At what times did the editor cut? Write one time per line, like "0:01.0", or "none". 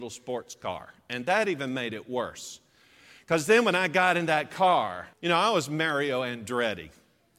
0:05.1